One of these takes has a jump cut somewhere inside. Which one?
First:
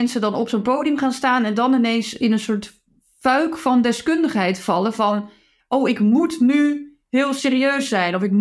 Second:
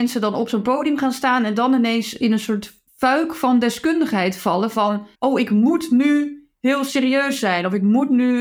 second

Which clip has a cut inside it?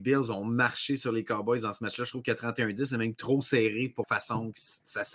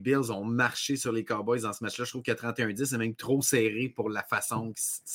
first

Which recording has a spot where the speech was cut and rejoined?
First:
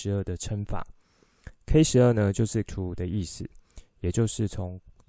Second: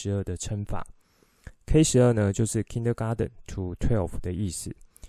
first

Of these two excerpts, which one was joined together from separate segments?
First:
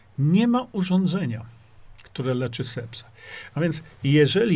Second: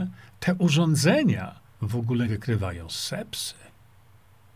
second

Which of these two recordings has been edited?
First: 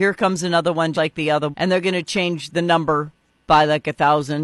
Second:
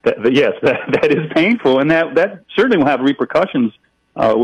first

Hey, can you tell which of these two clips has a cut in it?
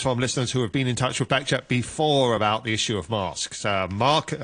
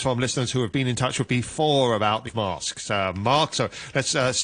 second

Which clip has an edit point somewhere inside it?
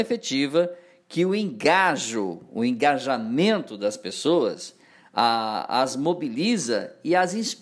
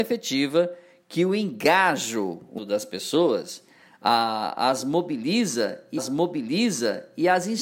second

